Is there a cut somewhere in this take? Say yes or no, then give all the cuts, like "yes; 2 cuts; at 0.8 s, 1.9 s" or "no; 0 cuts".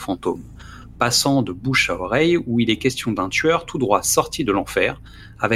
no; 0 cuts